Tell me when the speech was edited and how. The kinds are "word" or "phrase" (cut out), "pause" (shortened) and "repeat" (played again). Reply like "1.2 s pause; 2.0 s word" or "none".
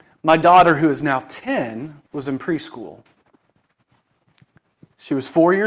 2.1 s pause